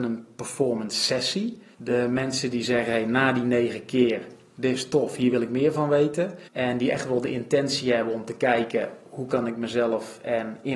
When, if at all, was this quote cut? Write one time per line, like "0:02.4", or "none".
0:01.7
0:06.5